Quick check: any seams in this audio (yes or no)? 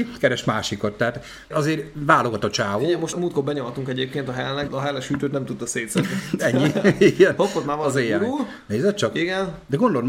yes